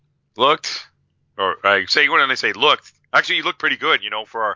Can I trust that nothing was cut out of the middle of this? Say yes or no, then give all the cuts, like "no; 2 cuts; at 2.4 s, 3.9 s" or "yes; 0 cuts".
yes; 0 cuts